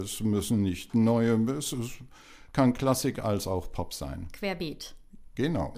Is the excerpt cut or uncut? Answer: uncut